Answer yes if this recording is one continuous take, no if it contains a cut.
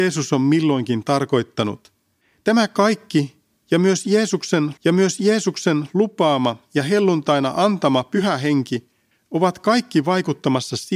no